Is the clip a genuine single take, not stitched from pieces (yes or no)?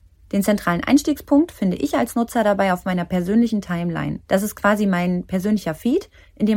no